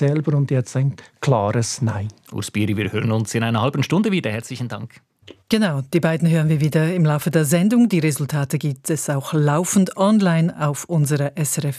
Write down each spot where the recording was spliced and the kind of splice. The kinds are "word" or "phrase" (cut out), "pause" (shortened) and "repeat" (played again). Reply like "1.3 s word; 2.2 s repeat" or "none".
5.4 s pause